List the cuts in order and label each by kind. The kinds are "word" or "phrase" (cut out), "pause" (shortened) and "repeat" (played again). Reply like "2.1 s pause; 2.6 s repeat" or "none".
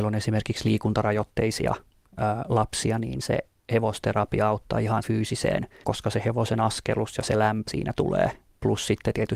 5.0 s word; 5.8 s word; 7.7 s word